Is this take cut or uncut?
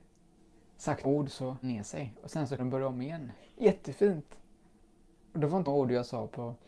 cut